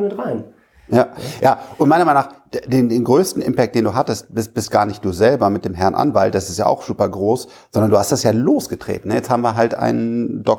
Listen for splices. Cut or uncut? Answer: uncut